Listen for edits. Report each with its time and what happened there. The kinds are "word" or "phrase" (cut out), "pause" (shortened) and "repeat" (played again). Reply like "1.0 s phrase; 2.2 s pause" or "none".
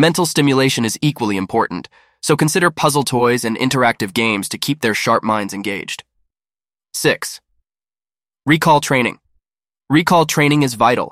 none